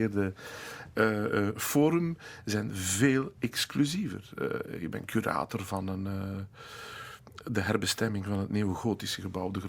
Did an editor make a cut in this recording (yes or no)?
no